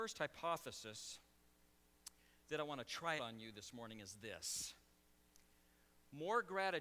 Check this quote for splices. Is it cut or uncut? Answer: cut